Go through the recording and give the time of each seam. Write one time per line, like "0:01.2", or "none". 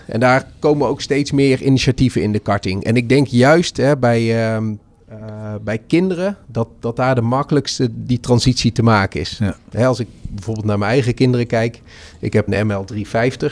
0:12.5